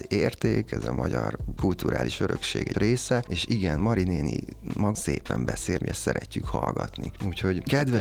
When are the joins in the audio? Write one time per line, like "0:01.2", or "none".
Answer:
0:02.7
0:04.9
0:05.8